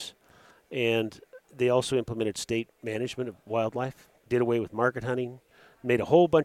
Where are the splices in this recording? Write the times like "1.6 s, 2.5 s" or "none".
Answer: 1.4 s, 2.7 s, 4.2 s